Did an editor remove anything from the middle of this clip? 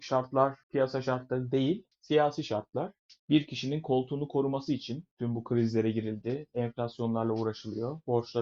no; 0 cuts

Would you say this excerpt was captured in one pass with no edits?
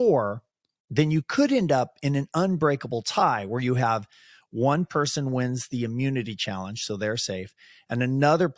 yes; 0 cuts

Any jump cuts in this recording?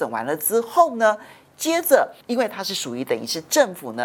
yes; 1 cut; at 2.2 s

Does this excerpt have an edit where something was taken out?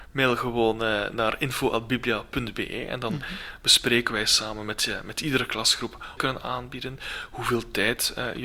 yes; 1 cut; at 6.2 s

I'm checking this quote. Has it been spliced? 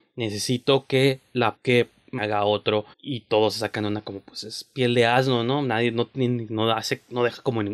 yes; 3 cuts; at 1.6 s, 2.2 s, 2.9 s

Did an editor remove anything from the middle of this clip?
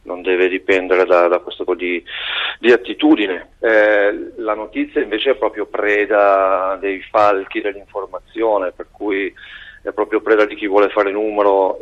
yes; 1 cut; at 1.7 s

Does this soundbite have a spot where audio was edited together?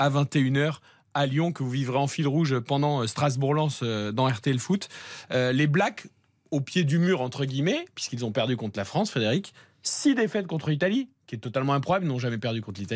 no; 0 cuts

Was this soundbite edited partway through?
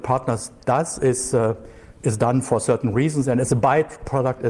no; 0 cuts

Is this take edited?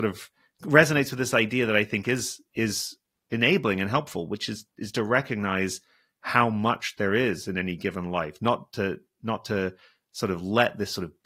no; 0 cuts

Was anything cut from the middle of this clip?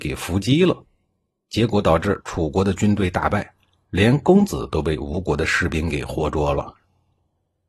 no; 0 cuts

